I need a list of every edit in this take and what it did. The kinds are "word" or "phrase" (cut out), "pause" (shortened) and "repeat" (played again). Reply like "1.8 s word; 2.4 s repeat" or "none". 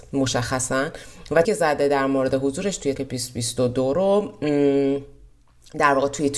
1.4 s word; 2.9 s word